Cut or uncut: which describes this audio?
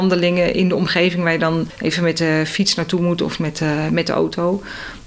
uncut